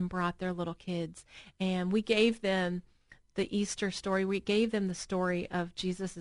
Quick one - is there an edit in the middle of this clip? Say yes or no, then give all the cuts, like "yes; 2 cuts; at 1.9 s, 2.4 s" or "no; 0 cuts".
no; 0 cuts